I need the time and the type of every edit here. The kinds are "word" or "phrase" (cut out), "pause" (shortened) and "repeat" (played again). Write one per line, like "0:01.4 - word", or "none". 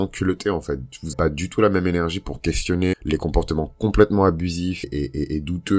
0:01.1 - word
0:02.9 - word
0:04.8 - word

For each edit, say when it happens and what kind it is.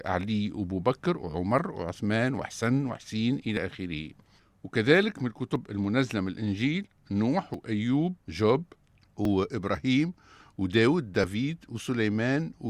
0:08.2 - pause

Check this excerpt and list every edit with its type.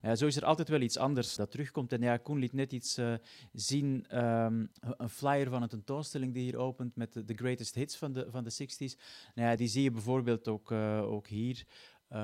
0:01.4 - word
0:04.7 - pause
0:09.6 - word

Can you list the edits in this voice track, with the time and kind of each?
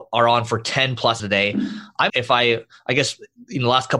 0:01.2 - word
0:02.1 - word

